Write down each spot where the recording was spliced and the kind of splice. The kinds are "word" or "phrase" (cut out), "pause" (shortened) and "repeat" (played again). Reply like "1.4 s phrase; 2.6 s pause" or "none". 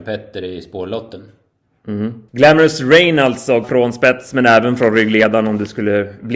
2.3 s pause; 3.6 s phrase